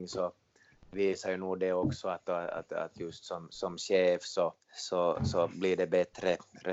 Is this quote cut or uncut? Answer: cut